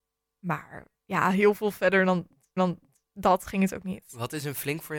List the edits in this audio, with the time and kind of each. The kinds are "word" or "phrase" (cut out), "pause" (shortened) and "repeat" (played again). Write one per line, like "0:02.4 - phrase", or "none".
0:02.6 - repeat